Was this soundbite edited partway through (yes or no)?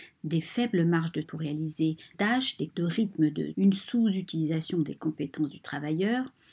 yes